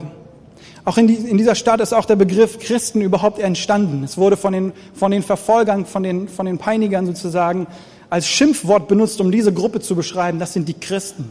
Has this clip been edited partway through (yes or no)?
no